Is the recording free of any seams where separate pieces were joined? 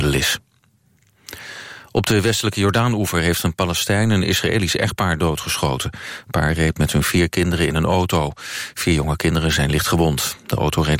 yes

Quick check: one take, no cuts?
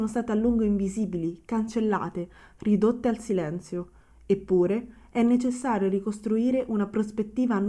yes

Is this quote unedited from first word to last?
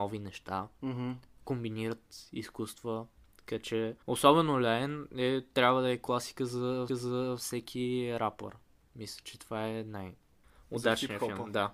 no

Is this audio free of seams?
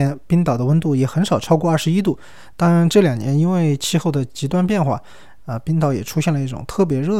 yes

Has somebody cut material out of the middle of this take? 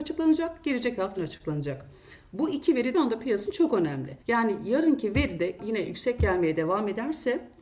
yes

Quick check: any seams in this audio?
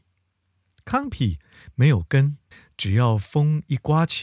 yes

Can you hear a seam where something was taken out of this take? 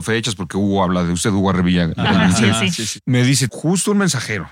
yes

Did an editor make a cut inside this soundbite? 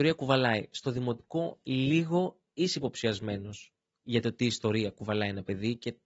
no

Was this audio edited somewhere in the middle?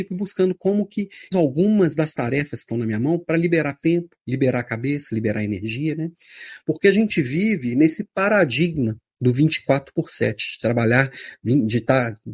yes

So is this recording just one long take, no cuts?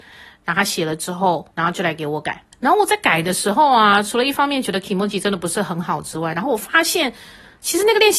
no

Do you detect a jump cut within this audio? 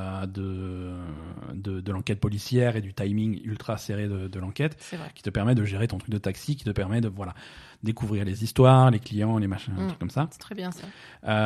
no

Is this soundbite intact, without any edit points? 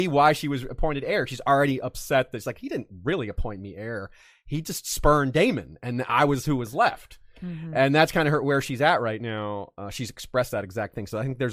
yes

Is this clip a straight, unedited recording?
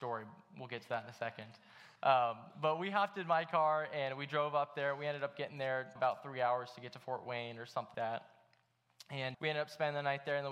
no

